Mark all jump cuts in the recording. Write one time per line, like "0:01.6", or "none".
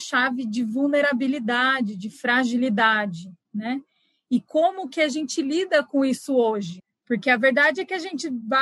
none